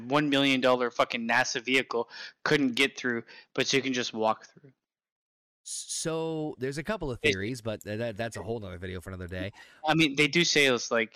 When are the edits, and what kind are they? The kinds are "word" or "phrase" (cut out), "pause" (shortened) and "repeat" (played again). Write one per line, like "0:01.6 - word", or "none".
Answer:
none